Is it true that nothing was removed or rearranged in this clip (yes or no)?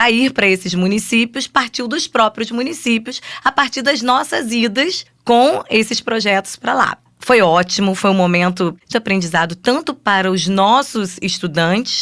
no